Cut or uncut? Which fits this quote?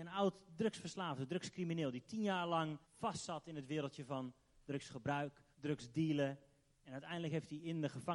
cut